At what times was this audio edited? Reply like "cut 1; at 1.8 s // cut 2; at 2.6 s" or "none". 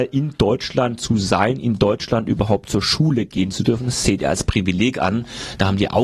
none